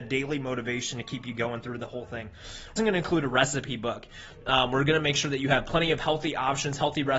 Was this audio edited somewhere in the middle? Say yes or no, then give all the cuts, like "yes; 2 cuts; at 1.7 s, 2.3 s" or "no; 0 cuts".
yes; 1 cut; at 2.8 s